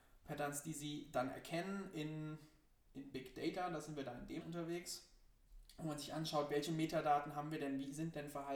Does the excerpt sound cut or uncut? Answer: cut